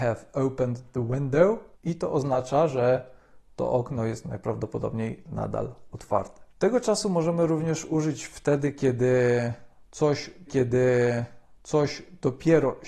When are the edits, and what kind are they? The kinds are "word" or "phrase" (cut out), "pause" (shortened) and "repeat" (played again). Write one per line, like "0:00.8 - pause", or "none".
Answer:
0:01.7 - pause
0:06.5 - pause
0:10.5 - repeat